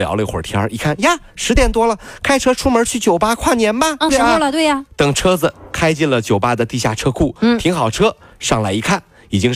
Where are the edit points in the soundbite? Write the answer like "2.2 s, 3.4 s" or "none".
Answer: 4.1 s